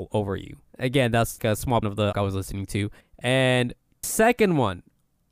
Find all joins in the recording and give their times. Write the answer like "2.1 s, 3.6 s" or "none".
1.4 s, 1.8 s, 2.1 s, 4.0 s